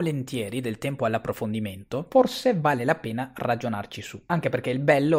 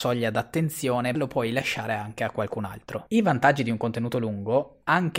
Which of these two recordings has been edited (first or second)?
second